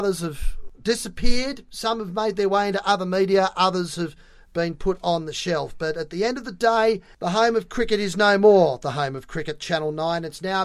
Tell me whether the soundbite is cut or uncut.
uncut